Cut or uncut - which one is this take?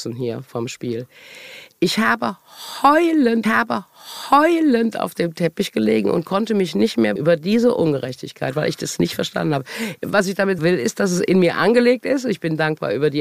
cut